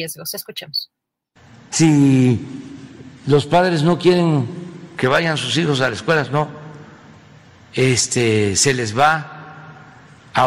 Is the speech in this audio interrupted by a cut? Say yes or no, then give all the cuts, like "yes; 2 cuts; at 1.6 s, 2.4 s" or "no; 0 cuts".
no; 0 cuts